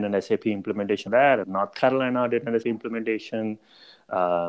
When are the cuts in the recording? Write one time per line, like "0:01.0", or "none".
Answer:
0:01.1
0:01.4
0:02.6